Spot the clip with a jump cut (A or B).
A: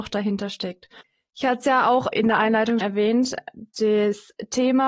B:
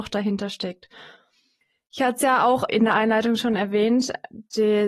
A